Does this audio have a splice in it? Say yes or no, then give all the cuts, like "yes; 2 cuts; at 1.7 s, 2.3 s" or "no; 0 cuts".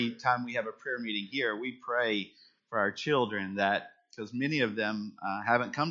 no; 0 cuts